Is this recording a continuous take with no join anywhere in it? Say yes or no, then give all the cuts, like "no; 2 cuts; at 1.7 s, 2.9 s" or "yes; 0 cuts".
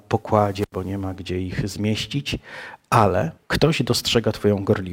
no; 1 cut; at 3.4 s